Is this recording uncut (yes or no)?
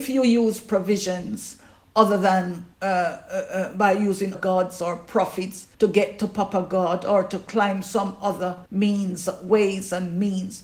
no